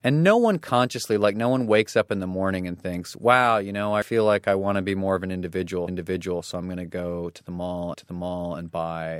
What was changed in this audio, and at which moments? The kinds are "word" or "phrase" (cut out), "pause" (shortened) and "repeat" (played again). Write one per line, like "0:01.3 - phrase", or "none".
0:04.0 - word
0:05.9 - repeat
0:07.9 - repeat